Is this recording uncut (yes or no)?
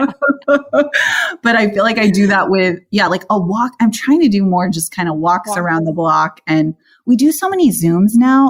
yes